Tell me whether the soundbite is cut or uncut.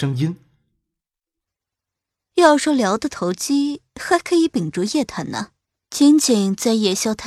cut